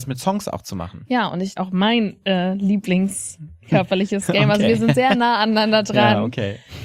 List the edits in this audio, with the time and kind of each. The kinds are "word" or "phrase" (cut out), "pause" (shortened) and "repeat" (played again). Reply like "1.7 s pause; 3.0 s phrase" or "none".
1.6 s phrase